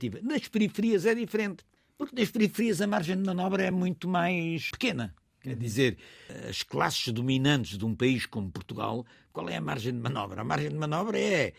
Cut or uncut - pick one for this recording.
uncut